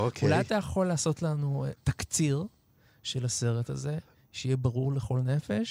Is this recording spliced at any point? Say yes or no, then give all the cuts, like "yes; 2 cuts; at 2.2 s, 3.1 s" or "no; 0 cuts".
no; 0 cuts